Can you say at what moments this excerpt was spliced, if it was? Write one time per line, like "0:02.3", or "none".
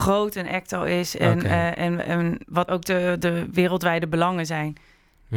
0:02.7